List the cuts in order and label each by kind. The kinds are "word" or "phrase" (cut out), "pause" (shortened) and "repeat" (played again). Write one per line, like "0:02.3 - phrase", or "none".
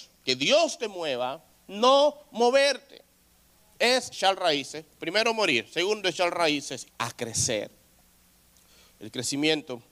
0:04.1 - word
0:06.8 - phrase